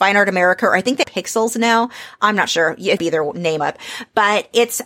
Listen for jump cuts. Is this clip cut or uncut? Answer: cut